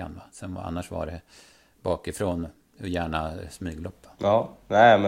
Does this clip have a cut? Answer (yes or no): no